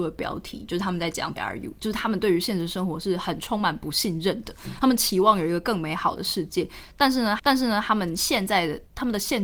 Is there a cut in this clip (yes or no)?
yes